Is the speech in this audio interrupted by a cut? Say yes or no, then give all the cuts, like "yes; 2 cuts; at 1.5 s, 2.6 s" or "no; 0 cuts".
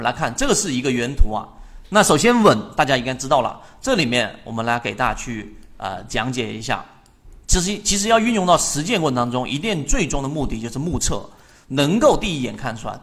yes; 1 cut; at 7.4 s